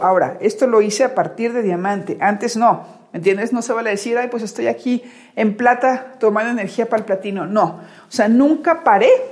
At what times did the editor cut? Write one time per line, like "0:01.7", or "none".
none